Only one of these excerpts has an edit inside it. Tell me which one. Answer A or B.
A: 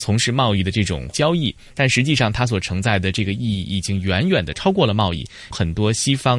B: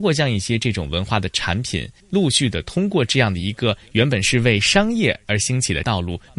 B